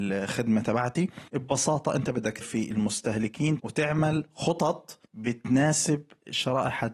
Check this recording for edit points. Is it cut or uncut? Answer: cut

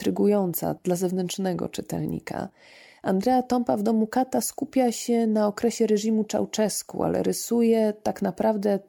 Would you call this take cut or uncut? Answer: uncut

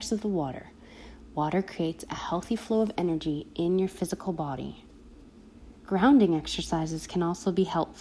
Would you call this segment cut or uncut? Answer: cut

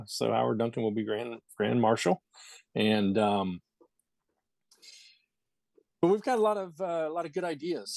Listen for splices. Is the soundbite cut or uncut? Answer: uncut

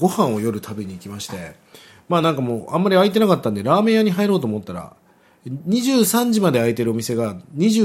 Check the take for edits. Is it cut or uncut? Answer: uncut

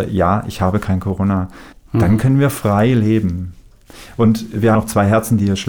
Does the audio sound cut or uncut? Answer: cut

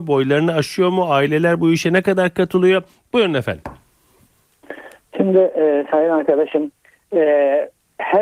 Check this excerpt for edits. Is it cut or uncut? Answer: uncut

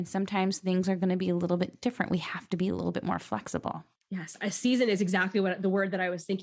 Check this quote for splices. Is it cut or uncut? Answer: uncut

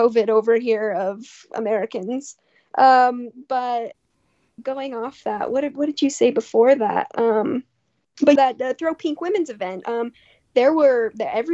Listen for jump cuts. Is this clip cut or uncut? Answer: cut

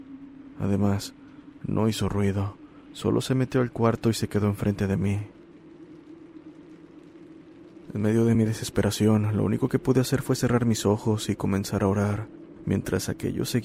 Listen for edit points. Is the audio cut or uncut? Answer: uncut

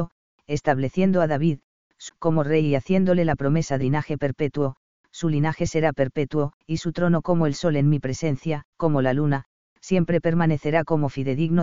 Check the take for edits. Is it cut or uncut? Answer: cut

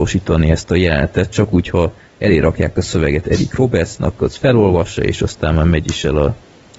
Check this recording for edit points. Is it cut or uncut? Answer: uncut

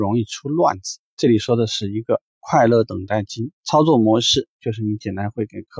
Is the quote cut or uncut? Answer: cut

